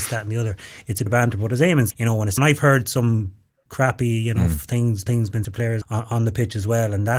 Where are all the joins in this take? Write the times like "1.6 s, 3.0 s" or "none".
1.1 s, 1.9 s, 2.4 s, 3.7 s, 5.1 s, 5.4 s, 5.8 s